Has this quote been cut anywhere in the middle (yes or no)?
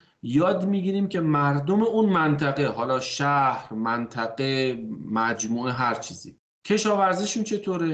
no